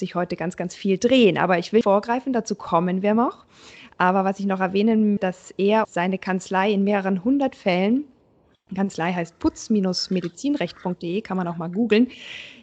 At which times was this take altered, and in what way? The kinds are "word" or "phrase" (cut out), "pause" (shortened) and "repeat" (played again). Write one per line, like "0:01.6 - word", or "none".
0:01.8 - word
0:05.2 - word
0:05.8 - word